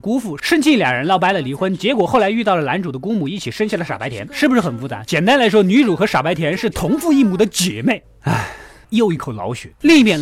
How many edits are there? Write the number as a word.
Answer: zero